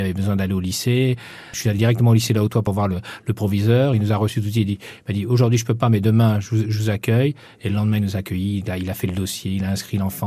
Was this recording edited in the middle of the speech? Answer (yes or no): no